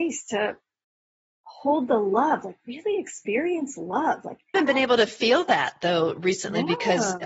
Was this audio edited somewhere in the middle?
yes; 1 cut; at 4.5 s

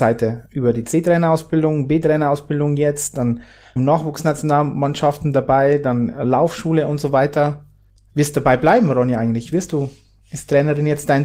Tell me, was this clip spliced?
yes; 2 cuts; at 3.8 s, 7.9 s

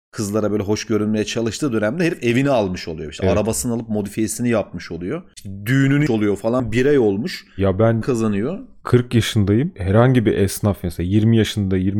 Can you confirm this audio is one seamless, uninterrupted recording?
no; 2 cuts; at 6.1 s, 8.0 s

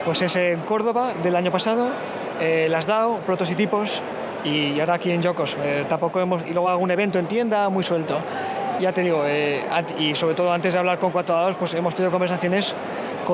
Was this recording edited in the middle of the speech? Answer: no; 0 cuts

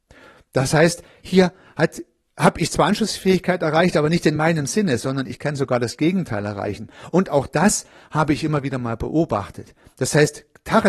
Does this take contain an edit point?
no; 0 cuts

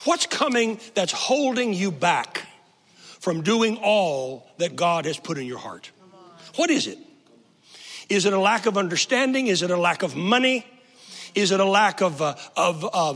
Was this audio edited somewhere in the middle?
no; 0 cuts

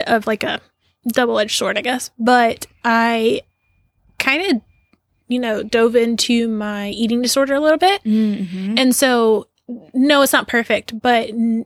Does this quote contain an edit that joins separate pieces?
no; 0 cuts

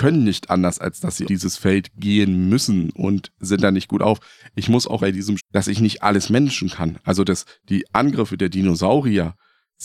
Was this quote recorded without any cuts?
no; 3 cuts; at 1.2 s, 5.0 s, 5.4 s

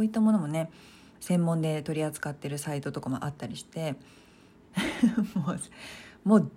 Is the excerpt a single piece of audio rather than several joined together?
no; 1 cut; at 4.6 s

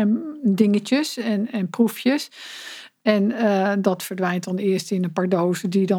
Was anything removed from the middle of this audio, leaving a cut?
no; 0 cuts

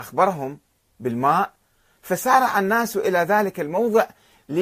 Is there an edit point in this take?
no; 0 cuts

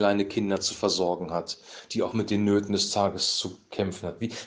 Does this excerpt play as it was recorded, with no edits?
yes; 0 cuts

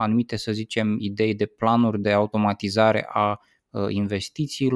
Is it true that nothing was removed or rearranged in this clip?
yes; 0 cuts

